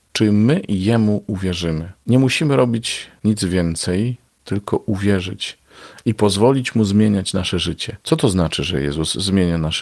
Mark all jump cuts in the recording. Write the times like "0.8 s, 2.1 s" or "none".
8.0 s